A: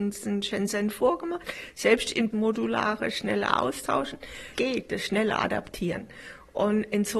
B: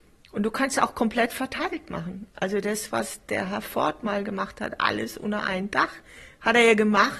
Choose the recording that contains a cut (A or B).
A